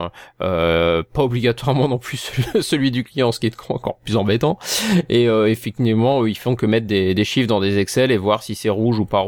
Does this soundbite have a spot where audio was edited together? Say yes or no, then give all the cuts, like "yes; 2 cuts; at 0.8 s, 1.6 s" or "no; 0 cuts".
no; 0 cuts